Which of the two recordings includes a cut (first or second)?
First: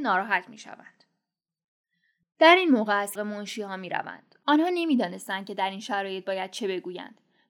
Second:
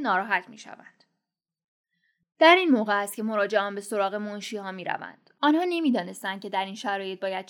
first